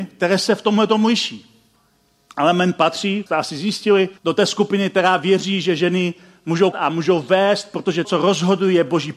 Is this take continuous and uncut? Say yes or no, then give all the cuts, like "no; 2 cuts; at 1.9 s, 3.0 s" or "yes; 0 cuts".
no; 4 cuts; at 3.3 s, 4.2 s, 6.7 s, 8.0 s